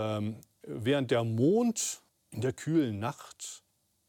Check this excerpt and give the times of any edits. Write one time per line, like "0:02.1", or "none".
0:02.1